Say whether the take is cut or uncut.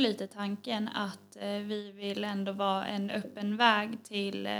uncut